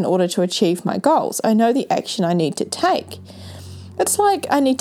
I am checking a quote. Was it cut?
no; 0 cuts

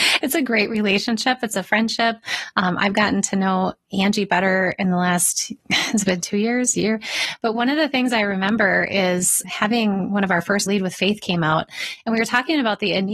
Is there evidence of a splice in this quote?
yes; 3 cuts; at 5.6 s, 9.4 s, 10.7 s

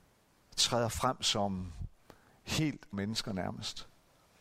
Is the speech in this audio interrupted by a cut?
yes; 1 cut; at 2.9 s

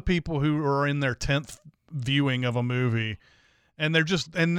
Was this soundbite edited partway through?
no; 0 cuts

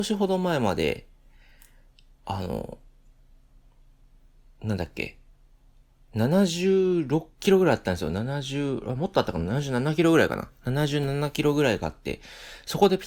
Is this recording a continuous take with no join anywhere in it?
yes; 0 cuts

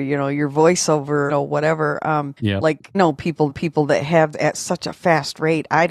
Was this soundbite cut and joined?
yes; 5 cuts; at 1.3 s, 2.4 s, 2.9 s, 3.5 s, 4.3 s

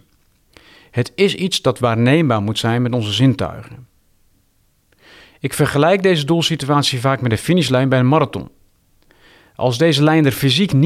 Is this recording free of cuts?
yes; 0 cuts

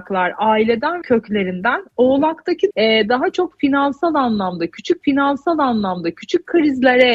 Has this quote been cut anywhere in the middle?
yes; 3 cuts; at 1.0 s, 2.7 s, 5.0 s

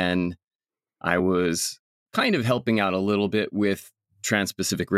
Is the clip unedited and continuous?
yes; 0 cuts

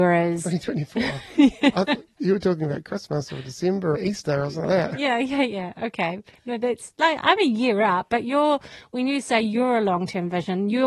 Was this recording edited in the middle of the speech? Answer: yes; 2 cuts; at 4.0 s, 4.6 s

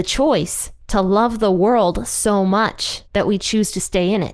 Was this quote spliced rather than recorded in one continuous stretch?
yes; 1 cut; at 3.1 s

